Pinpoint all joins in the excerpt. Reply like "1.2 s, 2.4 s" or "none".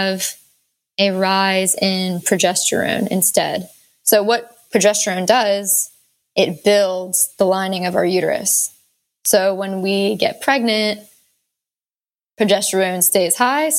none